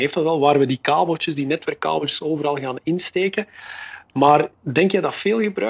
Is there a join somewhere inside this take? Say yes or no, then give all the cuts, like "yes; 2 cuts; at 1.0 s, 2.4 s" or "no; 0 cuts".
no; 0 cuts